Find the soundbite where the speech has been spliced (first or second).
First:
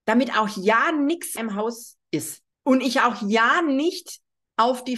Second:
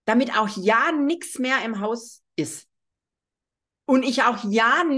first